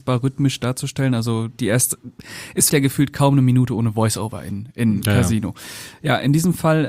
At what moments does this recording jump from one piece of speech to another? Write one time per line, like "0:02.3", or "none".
0:02.7